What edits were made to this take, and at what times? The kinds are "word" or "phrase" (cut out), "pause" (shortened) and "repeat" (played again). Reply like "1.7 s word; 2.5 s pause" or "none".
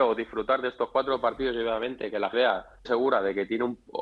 2.3 s word; 2.8 s word